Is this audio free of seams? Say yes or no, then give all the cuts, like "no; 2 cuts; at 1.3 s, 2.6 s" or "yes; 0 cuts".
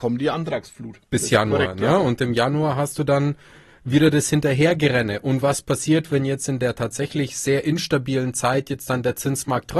yes; 0 cuts